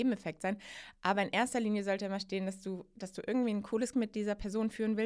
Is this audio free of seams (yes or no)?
no